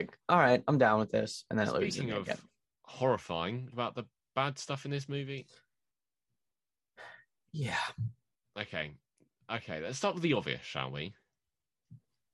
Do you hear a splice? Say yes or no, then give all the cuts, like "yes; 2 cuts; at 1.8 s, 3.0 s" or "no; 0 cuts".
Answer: yes; 1 cut; at 3.7 s